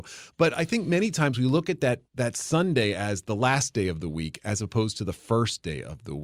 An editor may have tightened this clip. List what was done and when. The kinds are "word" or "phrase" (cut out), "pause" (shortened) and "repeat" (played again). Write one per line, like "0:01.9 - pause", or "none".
0:02.1 - pause